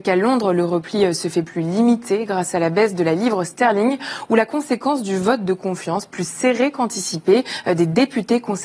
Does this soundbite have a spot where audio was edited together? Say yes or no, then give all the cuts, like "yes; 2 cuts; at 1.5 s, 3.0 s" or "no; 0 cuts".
no; 0 cuts